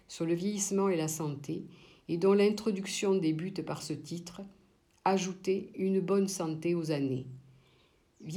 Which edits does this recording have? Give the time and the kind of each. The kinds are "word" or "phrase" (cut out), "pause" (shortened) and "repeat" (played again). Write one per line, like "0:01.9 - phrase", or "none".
none